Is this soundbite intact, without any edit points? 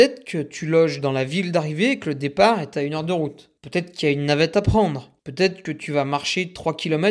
no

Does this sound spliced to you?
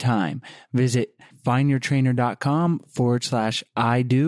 no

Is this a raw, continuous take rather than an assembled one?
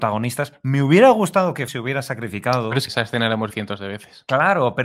no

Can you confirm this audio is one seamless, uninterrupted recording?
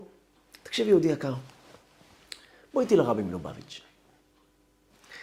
yes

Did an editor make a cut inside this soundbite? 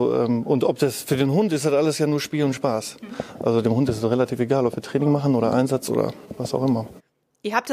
no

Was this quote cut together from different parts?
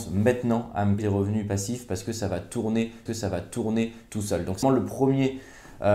yes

